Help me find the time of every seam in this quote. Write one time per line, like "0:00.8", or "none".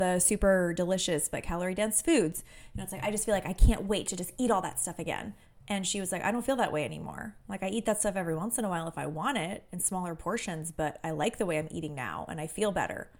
0:05.4
0:07.4

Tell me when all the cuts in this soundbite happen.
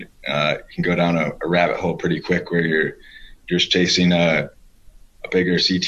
none

